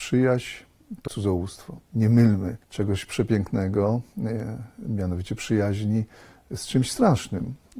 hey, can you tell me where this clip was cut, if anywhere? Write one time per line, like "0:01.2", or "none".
0:01.1
0:01.9
0:02.6